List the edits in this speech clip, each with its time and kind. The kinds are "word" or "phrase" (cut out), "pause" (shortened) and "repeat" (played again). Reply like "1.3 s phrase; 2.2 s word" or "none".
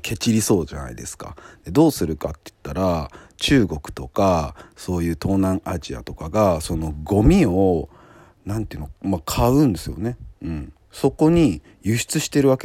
none